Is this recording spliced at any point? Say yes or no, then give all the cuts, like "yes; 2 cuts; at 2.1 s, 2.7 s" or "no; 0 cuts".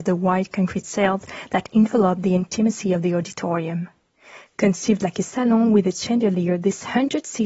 no; 0 cuts